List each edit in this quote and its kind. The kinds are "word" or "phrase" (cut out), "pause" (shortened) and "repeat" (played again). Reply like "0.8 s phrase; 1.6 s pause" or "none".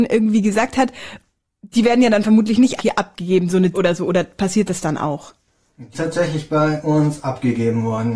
2.8 s word; 3.7 s word; 5.9 s word